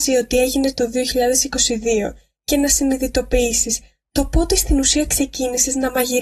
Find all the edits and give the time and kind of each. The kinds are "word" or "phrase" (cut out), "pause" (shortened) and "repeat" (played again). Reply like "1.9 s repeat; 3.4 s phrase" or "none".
none

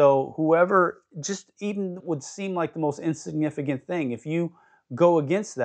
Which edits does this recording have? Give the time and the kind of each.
2.0 s word

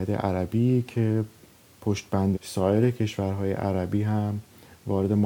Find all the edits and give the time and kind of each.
2.3 s word

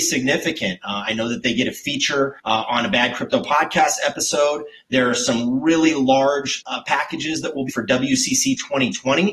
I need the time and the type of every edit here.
2.4 s pause; 6.6 s word; 7.7 s word

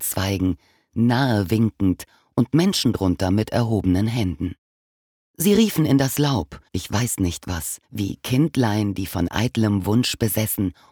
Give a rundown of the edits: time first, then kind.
6.7 s pause; 7.8 s pause

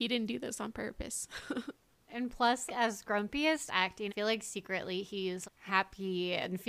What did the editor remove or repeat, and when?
2.1 s word; 2.7 s word; 3.7 s word; 4.1 s word; 5.4 s word

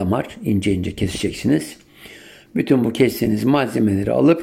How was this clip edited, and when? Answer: none

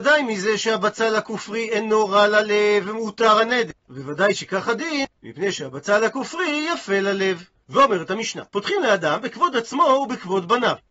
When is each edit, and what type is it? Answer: 8.5 s pause

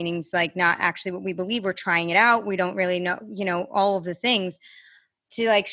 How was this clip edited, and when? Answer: none

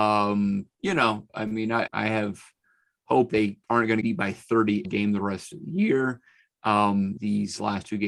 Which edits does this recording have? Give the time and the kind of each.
1.9 s word; 3.3 s word; 3.6 s pause; 4.0 s word; 4.8 s phrase; 7.2 s word

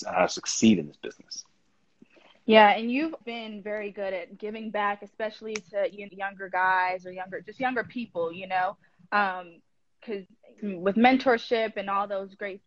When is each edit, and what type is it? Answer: 3.2 s word; 6.1 s word; 10.6 s word

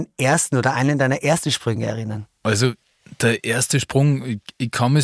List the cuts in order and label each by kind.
2.3 s pause

